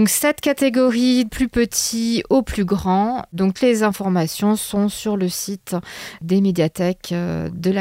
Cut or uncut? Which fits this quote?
cut